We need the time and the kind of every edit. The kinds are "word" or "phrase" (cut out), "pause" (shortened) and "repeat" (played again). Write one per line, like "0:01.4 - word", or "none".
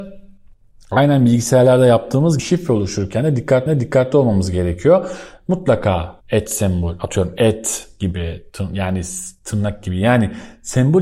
0:02.4 - word
0:03.7 - repeat
0:06.2 - pause